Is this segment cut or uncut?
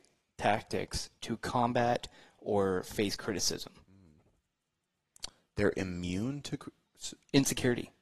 uncut